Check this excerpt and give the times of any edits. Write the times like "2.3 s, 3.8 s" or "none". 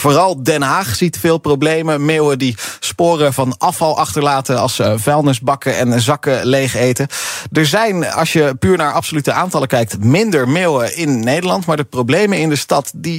none